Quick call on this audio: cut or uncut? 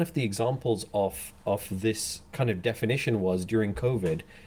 uncut